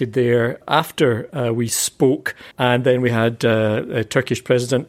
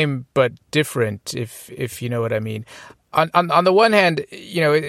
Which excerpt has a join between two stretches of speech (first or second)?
first